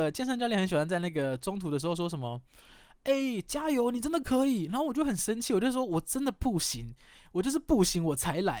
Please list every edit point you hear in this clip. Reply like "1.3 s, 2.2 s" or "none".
none

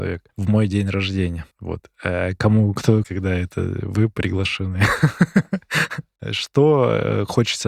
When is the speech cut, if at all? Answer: 3.0 s

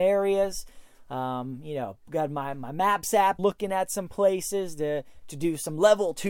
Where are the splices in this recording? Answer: 3.4 s

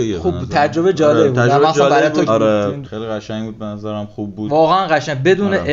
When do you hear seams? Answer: 2.3 s, 2.8 s

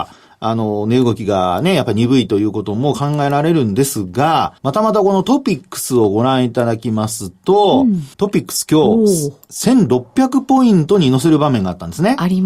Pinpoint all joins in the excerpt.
4.6 s, 8.1 s

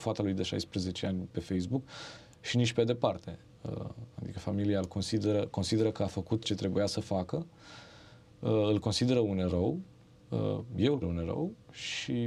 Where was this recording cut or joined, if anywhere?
1.3 s, 6.4 s, 11.0 s

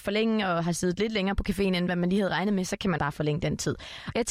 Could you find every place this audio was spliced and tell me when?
3.0 s

